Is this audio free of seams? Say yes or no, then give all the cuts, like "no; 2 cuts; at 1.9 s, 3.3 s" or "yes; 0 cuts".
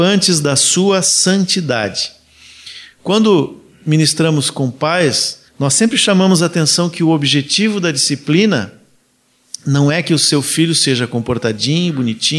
no; 1 cut; at 5.5 s